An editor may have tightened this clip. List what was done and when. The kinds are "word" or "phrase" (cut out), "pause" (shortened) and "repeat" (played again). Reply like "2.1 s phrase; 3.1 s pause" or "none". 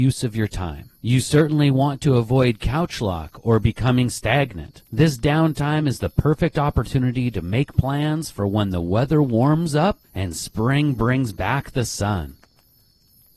1.0 s pause; 4.9 s pause; 10.0 s pause